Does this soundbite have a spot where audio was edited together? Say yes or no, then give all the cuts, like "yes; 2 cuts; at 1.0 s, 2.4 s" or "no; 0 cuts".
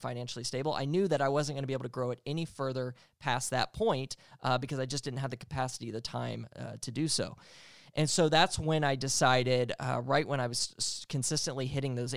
no; 0 cuts